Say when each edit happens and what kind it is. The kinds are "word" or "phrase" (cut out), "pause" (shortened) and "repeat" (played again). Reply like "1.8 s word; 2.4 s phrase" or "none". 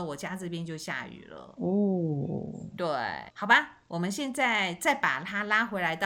3.3 s pause